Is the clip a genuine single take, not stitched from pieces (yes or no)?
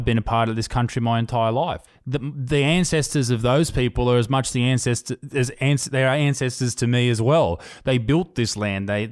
no